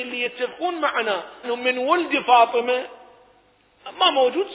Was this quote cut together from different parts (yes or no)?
yes